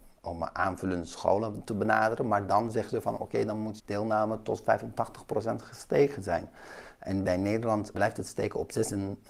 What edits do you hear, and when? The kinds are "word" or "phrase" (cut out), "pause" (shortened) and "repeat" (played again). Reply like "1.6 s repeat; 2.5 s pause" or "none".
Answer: 3.8 s word; 7.9 s word